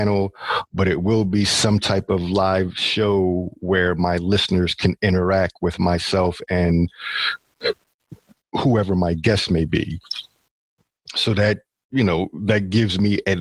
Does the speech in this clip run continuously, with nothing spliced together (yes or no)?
yes